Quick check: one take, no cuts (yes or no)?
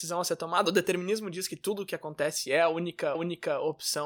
no